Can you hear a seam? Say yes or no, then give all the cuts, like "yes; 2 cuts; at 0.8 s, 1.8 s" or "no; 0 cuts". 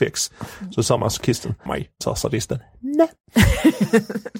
yes; 2 cuts; at 1.7 s, 2.0 s